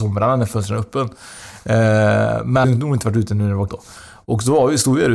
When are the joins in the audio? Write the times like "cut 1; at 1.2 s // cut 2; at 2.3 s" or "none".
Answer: cut 1; at 2.6 s // cut 2; at 3.7 s